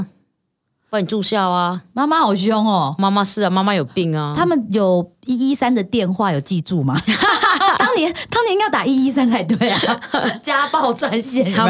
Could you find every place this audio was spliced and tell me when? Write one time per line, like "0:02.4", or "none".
0:07.8